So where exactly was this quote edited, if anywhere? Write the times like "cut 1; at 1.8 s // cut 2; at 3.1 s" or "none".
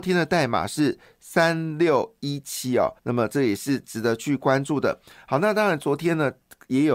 cut 1; at 3.0 s

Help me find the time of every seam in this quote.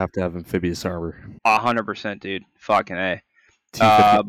cut 1; at 1.4 s

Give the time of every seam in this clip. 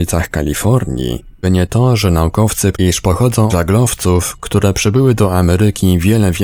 cut 1; at 1.4 s // cut 2; at 2.7 s // cut 3; at 3.5 s

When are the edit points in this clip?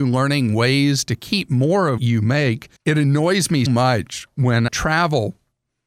cut 1; at 2.0 s // cut 2; at 2.8 s // cut 3; at 3.7 s // cut 4; at 4.7 s

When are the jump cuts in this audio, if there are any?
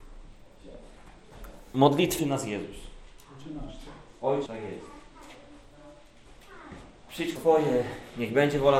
cut 1; at 2.2 s // cut 2; at 4.5 s // cut 3; at 7.4 s

